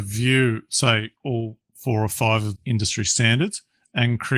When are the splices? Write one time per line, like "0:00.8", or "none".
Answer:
0:01.2
0:02.6